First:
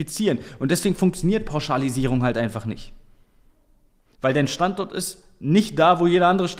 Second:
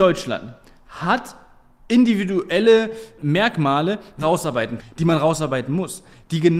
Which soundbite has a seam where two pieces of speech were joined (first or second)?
second